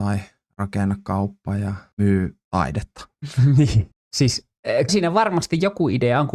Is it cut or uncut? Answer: cut